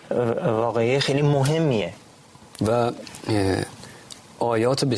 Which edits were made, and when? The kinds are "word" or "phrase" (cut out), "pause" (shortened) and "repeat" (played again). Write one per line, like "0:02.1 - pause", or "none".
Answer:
0:02.6 - word